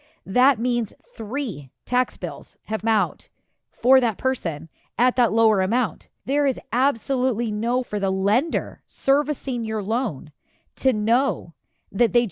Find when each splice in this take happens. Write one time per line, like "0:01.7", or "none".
0:02.8
0:06.2
0:07.8